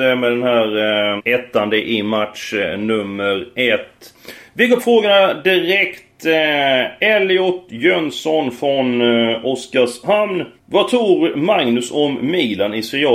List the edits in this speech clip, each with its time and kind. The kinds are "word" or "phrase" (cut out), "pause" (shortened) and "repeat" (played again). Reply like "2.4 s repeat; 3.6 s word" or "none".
1.2 s word; 4.8 s word; 10.6 s pause